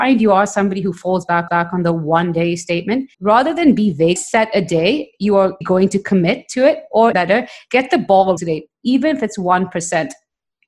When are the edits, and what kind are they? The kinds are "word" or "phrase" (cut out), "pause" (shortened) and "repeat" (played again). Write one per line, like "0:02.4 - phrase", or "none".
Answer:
0:01.5 - repeat
0:03.1 - pause
0:04.2 - phrase
0:05.6 - word
0:07.1 - word
0:08.4 - word